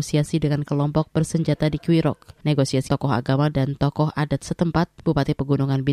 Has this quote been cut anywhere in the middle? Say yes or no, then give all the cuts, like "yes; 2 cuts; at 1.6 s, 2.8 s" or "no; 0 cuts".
yes; 1 cut; at 2.9 s